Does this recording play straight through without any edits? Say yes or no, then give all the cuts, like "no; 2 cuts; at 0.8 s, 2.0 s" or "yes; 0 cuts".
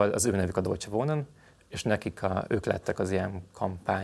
yes; 0 cuts